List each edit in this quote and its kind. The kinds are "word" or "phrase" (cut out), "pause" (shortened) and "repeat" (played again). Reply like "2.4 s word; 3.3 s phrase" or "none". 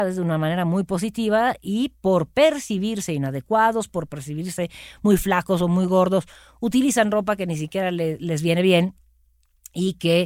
none